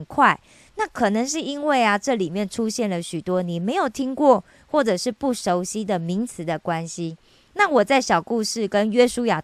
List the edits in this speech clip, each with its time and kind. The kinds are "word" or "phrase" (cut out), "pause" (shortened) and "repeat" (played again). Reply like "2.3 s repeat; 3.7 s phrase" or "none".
none